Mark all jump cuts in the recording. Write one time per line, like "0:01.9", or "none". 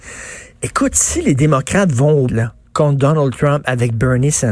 0:02.3